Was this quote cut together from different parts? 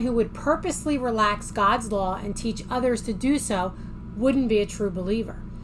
no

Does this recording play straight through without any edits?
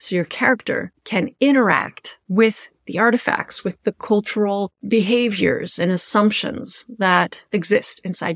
no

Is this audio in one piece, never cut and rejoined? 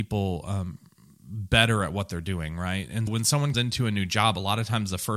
no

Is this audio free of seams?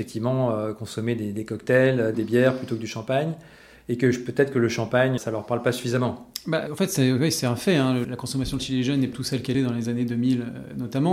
no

